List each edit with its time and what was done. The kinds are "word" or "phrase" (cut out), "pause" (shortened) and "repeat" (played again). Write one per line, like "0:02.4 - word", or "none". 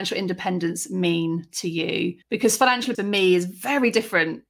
0:02.2 - pause
0:02.9 - word